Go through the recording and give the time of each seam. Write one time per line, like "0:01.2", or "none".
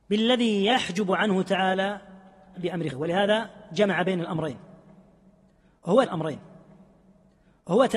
0:02.5
0:02.9
0:06.1